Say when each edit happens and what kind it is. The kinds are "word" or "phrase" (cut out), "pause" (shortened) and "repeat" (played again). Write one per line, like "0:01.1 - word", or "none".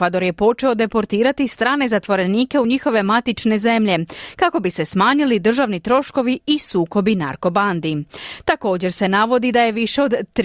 none